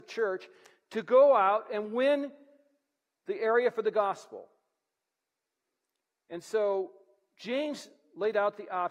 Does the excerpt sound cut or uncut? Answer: uncut